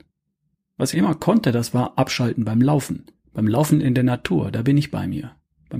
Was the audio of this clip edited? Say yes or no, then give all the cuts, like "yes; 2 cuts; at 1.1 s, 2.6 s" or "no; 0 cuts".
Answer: yes; 2 cuts; at 0.9 s, 3.2 s